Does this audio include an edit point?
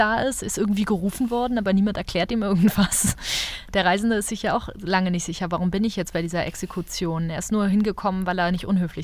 no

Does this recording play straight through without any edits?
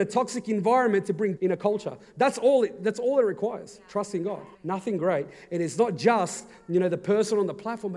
no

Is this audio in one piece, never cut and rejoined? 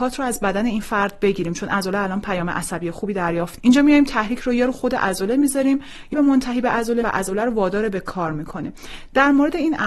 no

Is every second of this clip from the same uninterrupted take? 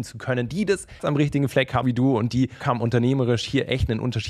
no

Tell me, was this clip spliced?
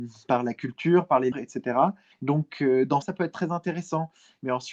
yes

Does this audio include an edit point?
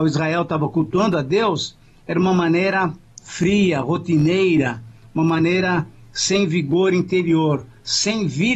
no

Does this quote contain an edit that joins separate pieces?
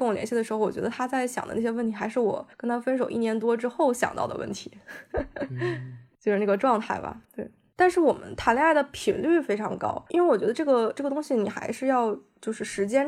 yes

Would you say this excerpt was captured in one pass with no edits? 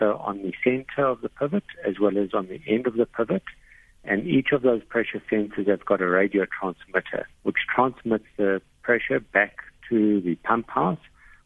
no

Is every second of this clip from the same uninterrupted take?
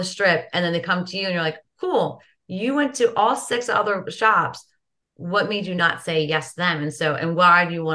yes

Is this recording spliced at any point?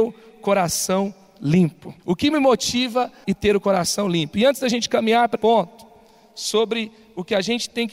yes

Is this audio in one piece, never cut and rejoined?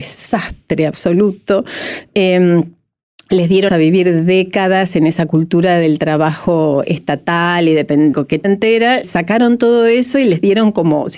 no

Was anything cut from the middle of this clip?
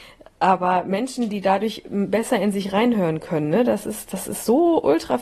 no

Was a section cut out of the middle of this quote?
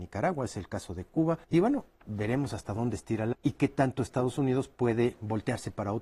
yes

